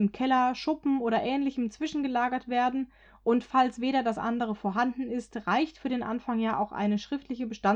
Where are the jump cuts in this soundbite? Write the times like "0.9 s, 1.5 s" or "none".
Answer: 4.1 s